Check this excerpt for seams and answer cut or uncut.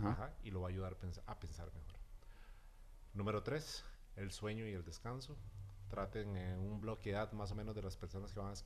uncut